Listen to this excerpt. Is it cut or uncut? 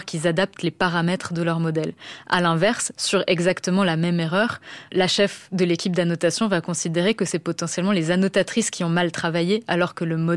uncut